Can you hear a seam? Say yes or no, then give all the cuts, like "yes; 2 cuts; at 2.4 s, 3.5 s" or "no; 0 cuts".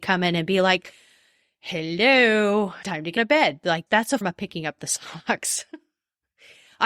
yes; 4 cuts; at 2.8 s, 3.2 s, 3.9 s, 4.2 s